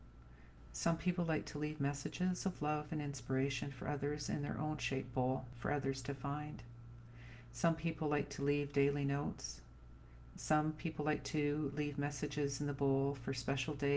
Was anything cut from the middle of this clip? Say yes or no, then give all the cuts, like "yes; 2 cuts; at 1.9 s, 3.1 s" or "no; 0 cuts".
yes; 1 cut; at 4.8 s